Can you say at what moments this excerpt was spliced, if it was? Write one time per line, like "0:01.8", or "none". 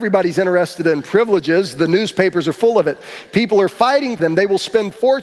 0:04.2